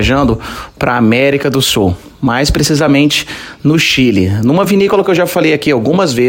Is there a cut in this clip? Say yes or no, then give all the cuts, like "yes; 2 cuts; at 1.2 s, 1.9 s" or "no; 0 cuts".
no; 0 cuts